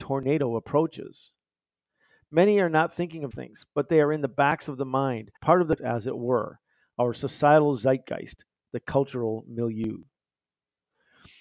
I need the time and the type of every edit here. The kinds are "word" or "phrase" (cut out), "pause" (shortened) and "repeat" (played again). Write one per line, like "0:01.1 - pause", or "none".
0:03.3 - word
0:05.4 - pause
0:05.8 - phrase